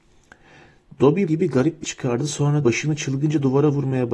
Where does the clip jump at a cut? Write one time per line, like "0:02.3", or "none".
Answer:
0:01.3
0:01.8
0:02.6